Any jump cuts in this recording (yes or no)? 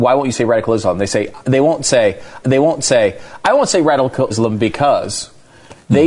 yes